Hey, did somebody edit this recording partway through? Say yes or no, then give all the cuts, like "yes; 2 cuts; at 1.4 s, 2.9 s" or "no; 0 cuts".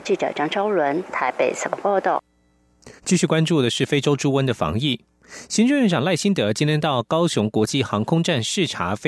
yes; 1 cut; at 3.0 s